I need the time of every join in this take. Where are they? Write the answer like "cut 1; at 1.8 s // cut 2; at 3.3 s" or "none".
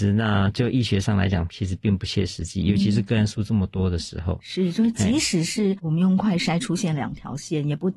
none